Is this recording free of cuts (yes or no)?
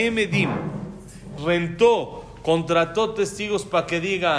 no